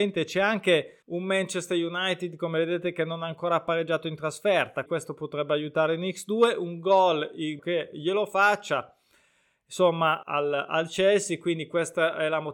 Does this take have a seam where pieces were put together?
yes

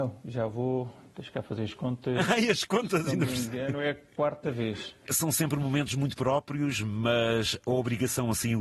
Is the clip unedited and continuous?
yes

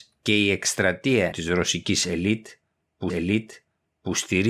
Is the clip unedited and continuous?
no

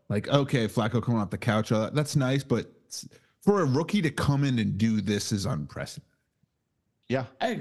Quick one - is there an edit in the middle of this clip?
no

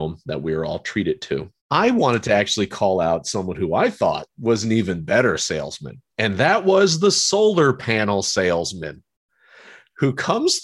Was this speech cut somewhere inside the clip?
yes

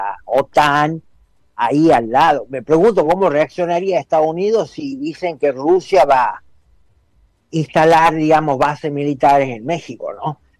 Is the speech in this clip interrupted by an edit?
no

